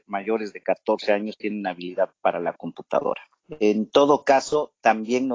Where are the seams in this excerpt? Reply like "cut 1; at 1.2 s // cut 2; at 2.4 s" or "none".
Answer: cut 1; at 2.1 s